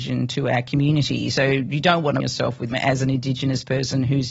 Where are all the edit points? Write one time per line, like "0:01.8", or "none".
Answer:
0:02.2
0:02.7